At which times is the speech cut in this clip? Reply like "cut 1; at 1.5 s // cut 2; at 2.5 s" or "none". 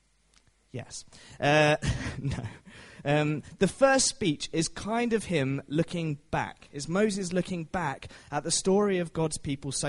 none